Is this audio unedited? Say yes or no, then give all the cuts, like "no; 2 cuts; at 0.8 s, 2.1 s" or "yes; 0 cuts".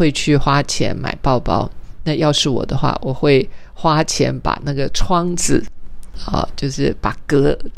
yes; 0 cuts